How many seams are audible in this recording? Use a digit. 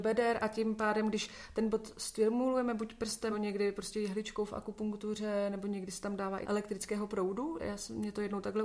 3